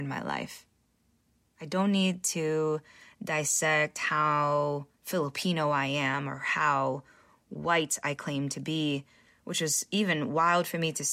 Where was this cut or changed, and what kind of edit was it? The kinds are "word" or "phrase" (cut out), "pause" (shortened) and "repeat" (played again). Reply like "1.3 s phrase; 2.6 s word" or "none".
none